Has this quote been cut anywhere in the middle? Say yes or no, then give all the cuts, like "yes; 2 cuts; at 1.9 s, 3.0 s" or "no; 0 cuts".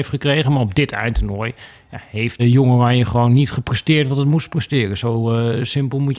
yes; 1 cut; at 2.4 s